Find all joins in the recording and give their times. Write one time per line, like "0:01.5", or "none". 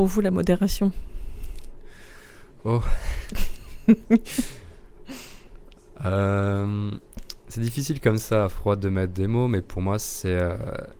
none

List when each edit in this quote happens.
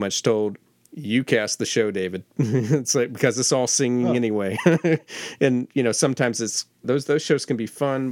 0:06.8

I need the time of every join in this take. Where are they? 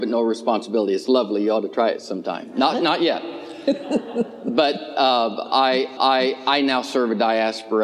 0:06.0

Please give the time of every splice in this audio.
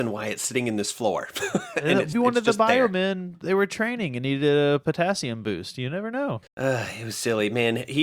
0:02.1
0:06.5

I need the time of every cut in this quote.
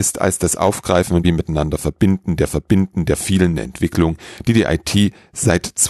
0:01.2
0:02.5

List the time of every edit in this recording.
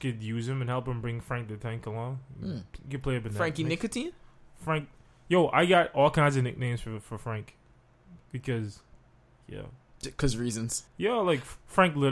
0:10.9

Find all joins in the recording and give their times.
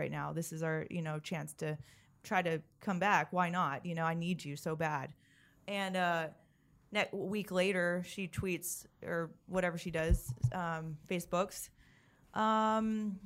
none

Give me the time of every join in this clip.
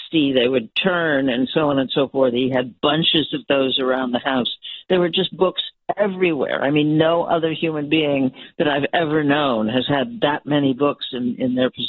none

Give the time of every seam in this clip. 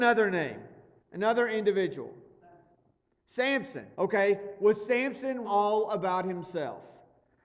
0:03.9
0:05.4

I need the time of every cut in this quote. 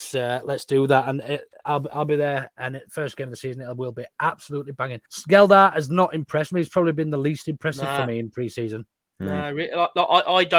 0:05.1

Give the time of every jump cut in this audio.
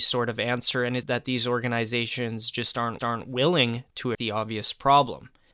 0:01.0
0:03.0
0:04.1

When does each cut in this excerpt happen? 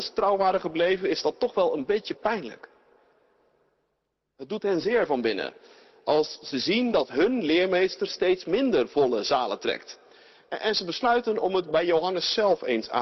none

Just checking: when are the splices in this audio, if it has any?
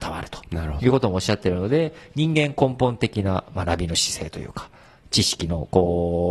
none

